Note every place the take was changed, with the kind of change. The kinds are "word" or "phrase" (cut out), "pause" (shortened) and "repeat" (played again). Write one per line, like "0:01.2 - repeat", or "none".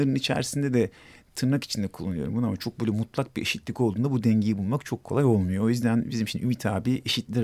none